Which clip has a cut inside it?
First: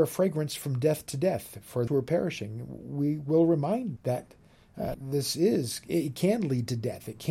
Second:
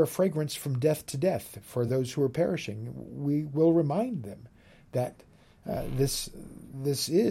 first; 3 cuts; at 1.9 s, 4.0 s, 4.9 s

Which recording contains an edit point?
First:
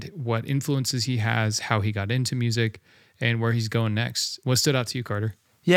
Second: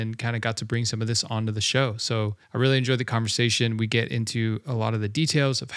second; 1 cut; at 2.4 s

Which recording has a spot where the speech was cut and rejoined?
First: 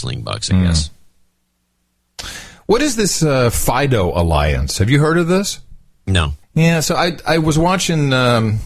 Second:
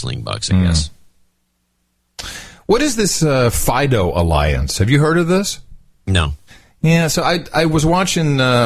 first; 1 cut; at 6.4 s

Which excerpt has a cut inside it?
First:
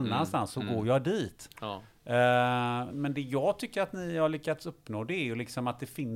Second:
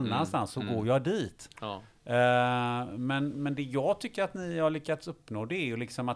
first; 1 cut; at 2.9 s

